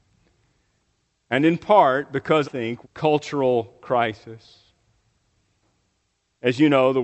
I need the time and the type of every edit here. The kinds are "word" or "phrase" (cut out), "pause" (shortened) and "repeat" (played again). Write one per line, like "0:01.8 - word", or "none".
0:02.4 - word
0:02.8 - phrase